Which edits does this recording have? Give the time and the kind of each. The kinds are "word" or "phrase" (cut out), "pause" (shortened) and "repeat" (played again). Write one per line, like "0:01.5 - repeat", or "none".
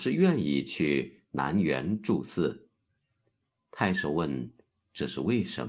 none